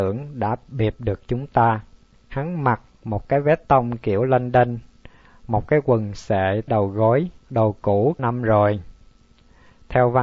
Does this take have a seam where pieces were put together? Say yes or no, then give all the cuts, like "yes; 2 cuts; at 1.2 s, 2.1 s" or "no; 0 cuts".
yes; 4 cuts; at 2.1 s, 6.7 s, 7.4 s, 8.2 s